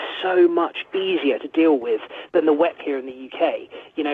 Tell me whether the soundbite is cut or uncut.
cut